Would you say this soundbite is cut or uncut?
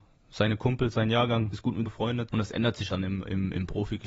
cut